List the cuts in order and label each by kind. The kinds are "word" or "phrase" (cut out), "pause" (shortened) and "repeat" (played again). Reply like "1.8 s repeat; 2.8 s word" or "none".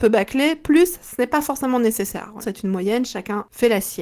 2.4 s word